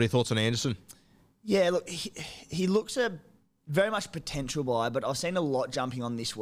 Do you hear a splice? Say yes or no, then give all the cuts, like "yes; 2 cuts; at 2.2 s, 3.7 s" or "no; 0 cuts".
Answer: no; 0 cuts